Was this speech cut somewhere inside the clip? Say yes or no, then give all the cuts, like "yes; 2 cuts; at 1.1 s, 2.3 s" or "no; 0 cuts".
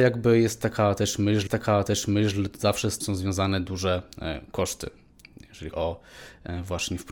yes; 3 cuts; at 1.5 s, 3.0 s, 5.7 s